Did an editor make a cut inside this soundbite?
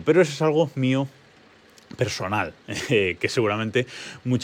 no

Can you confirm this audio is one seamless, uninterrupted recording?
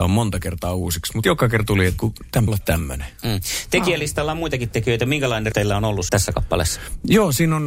no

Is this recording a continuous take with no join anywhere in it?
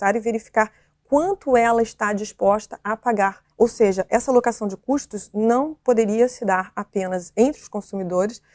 no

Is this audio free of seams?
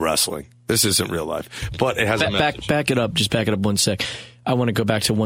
yes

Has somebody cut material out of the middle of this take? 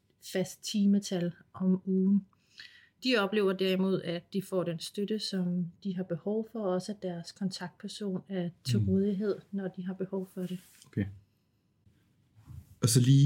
no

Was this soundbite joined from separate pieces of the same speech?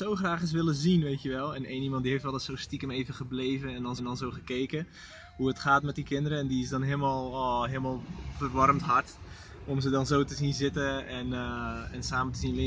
yes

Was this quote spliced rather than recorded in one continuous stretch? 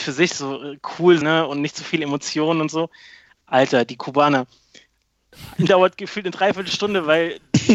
yes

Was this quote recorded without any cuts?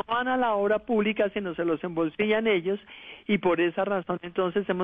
yes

